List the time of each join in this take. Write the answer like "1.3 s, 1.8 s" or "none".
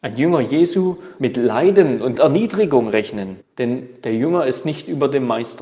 1.2 s, 2.1 s, 3.4 s